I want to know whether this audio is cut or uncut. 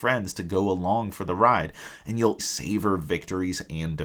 cut